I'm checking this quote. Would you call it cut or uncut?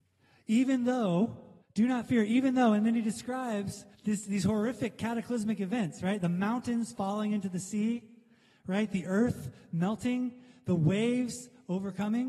cut